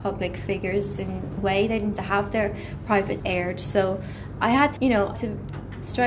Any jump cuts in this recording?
yes; 5 cuts; at 1.4 s, 1.9 s, 3.2 s, 4.8 s, 5.1 s

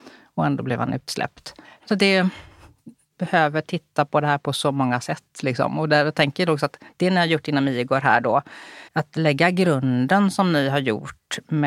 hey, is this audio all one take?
no; 2 cuts; at 1.6 s, 8.9 s

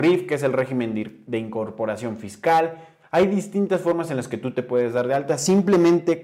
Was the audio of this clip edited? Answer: no; 0 cuts

